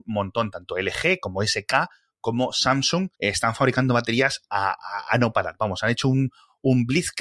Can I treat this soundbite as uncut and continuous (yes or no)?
no